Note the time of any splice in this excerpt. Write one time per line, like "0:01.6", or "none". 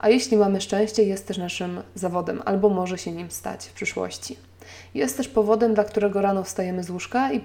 none

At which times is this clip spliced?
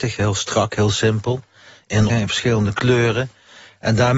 0:02.1

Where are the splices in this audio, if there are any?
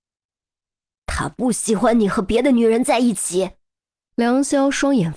0:03.6

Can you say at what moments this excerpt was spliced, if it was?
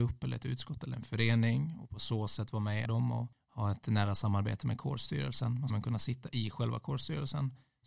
0:02.9
0:03.3
0:05.7

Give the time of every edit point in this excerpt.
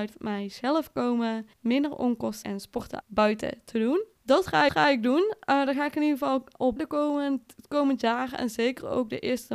0:01.5
0:02.4
0:03.0
0:04.2
0:04.7
0:06.8

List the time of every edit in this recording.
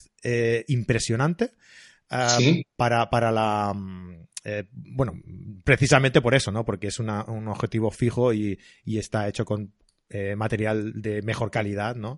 none

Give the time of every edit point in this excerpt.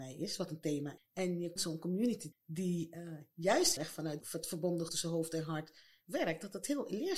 0:01.0
0:01.6
0:02.3
0:03.8
0:04.2
0:04.9

